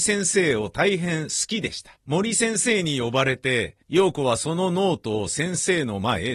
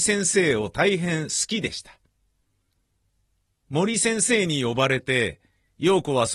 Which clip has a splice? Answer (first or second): first